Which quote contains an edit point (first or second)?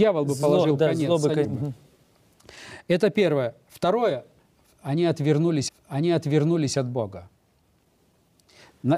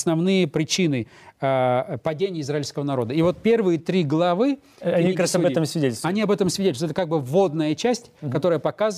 first